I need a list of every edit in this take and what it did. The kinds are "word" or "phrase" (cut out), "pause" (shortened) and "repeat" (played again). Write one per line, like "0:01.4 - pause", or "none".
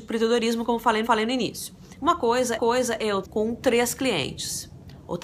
0:01.0 - repeat
0:02.6 - repeat
0:03.2 - word